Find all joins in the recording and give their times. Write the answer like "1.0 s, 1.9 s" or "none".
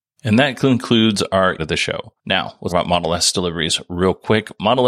1.6 s, 2.2 s, 2.7 s